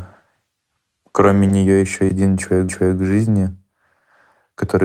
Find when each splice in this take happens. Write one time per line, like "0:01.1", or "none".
0:02.1
0:02.7